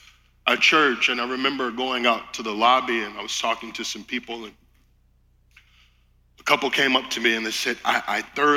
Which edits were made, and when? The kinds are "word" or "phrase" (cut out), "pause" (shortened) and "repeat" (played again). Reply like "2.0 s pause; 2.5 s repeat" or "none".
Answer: none